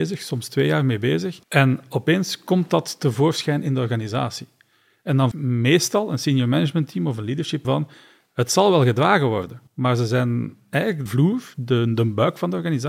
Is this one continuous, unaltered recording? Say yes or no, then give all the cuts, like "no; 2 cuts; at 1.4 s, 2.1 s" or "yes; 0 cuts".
no; 5 cuts; at 1.4 s, 5.3 s, 7.6 s, 9.7 s, 11.1 s